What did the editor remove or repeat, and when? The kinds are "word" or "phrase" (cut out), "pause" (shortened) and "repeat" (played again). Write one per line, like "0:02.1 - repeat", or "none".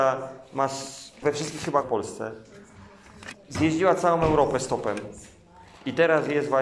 0:01.2 - word
0:01.8 - word